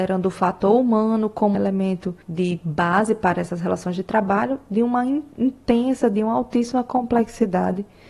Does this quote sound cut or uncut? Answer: cut